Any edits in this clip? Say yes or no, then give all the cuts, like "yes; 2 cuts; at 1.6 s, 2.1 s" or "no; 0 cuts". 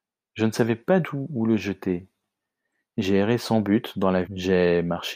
yes; 2 cuts; at 1.0 s, 4.2 s